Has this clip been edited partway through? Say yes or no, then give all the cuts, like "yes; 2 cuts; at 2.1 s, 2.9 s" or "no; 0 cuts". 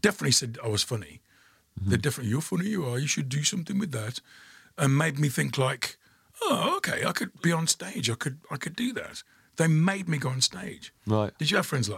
no; 0 cuts